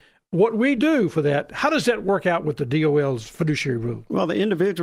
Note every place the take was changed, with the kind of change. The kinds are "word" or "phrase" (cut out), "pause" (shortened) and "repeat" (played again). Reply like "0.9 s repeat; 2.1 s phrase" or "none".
none